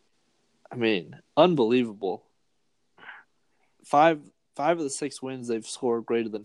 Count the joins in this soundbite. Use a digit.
0